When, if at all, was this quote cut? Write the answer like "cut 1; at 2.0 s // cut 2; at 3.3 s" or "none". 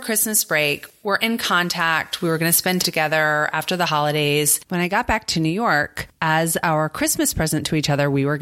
cut 1; at 2.8 s

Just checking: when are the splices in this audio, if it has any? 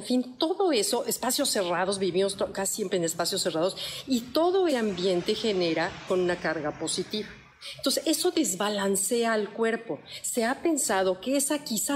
cut 1; at 4.7 s // cut 2; at 6.1 s

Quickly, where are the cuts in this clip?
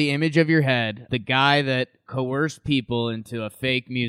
cut 1; at 1.1 s

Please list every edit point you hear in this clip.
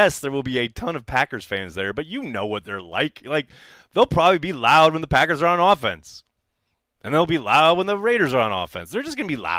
none

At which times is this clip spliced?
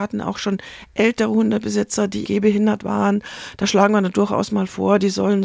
cut 1; at 2.3 s

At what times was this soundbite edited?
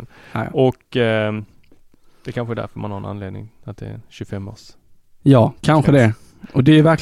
none

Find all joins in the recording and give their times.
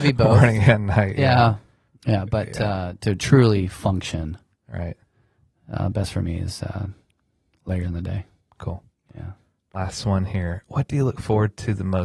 none

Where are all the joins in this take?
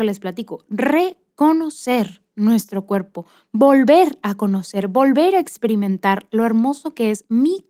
none

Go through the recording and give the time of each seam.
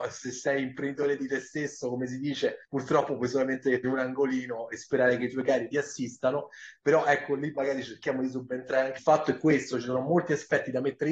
cut 1; at 2.6 s // cut 2; at 3.8 s // cut 3; at 9.0 s

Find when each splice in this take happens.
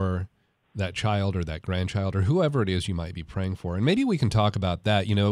none

